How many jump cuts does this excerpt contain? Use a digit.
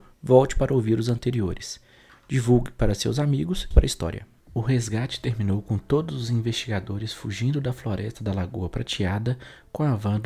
2